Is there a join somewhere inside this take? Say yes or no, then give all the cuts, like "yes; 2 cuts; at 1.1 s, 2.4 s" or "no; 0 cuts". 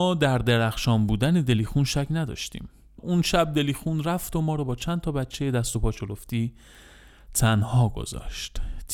no; 0 cuts